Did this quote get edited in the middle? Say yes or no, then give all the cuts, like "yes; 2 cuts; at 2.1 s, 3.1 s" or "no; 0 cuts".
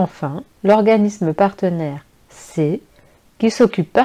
no; 0 cuts